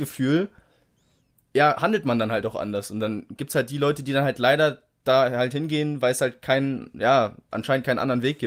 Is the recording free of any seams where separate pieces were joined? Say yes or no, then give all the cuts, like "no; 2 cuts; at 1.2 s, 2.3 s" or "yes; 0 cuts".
yes; 0 cuts